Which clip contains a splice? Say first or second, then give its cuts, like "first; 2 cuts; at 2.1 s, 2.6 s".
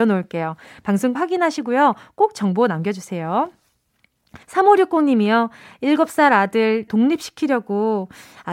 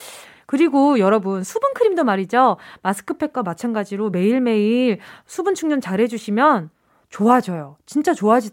first; 3 cuts; at 1.2 s, 4.4 s, 6.9 s